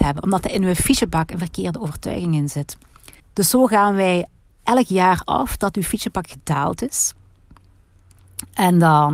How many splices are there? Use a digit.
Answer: 2